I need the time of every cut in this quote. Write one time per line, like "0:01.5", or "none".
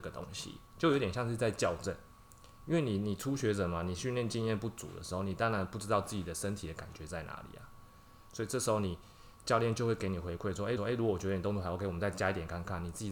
0:10.8